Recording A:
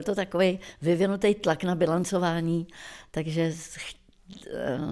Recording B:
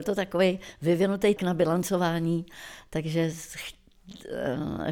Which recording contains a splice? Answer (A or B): B